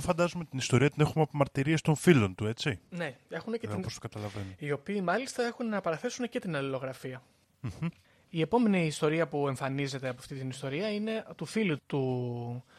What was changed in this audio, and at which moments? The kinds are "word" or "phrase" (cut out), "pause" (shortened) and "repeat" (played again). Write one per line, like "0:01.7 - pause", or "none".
0:11.8 - word